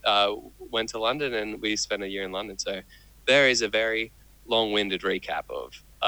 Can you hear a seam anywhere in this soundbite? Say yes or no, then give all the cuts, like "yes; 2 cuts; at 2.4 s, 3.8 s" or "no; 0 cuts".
no; 0 cuts